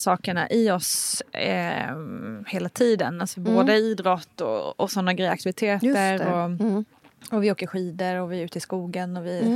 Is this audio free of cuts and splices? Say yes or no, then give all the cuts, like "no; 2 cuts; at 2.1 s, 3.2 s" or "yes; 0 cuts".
yes; 0 cuts